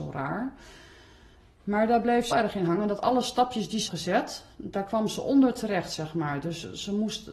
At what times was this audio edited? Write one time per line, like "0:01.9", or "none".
0:02.3
0:03.9